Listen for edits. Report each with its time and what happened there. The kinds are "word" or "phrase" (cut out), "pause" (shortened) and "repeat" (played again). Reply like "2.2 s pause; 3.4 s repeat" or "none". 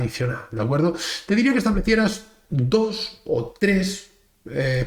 none